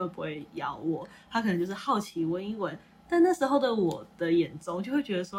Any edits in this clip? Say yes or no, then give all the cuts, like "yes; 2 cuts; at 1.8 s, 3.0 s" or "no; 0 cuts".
no; 0 cuts